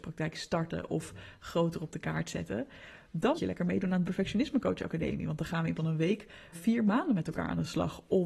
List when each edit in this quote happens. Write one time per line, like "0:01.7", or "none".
0:03.3
0:04.0
0:05.8
0:06.5